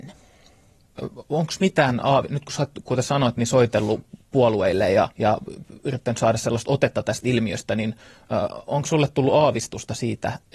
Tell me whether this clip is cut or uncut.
cut